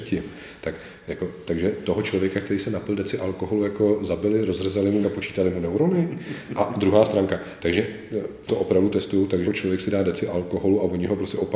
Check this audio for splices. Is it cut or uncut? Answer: cut